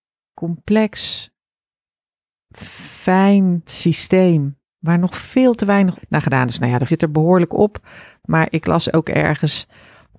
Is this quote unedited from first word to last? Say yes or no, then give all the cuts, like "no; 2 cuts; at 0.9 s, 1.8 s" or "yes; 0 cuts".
no; 3 cuts; at 3.7 s, 5.9 s, 6.9 s